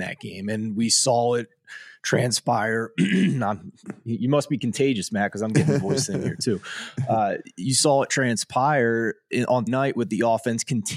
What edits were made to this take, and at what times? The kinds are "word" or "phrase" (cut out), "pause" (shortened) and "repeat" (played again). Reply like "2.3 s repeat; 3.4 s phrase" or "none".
9.7 s word